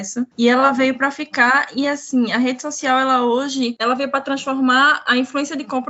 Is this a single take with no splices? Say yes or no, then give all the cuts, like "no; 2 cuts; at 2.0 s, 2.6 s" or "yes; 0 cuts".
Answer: yes; 0 cuts